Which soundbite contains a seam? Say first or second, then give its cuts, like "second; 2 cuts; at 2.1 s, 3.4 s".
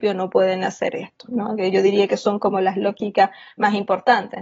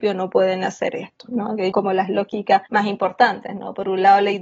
second; 2 cuts; at 1.7 s, 2.7 s